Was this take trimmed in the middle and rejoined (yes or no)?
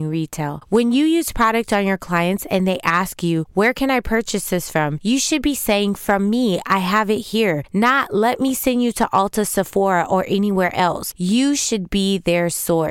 no